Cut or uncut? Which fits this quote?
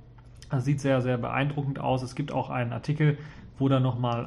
uncut